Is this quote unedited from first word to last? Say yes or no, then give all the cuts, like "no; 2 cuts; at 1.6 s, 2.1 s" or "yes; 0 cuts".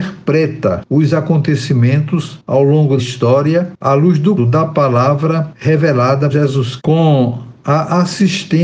no; 4 cuts; at 3.0 s, 4.4 s, 6.3 s, 6.8 s